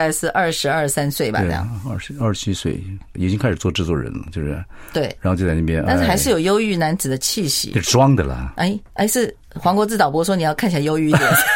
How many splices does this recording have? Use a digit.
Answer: 1